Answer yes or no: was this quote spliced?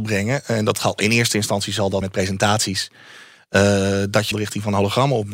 yes